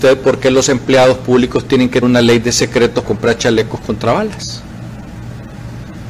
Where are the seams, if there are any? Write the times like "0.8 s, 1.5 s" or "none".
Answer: 2.0 s, 3.0 s